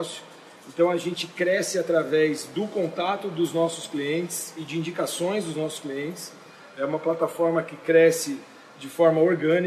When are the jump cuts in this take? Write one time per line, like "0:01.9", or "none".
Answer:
none

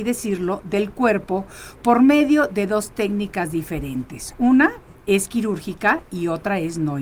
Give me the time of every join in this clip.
none

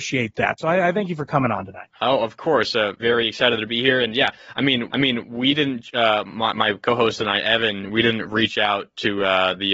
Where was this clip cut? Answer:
0:03.0
0:04.9

